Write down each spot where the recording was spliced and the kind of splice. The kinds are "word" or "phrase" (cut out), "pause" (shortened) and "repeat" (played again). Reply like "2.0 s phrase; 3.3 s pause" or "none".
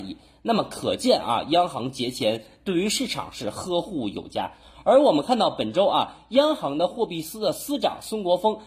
none